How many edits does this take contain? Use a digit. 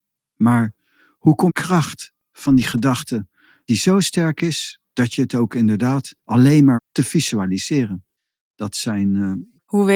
4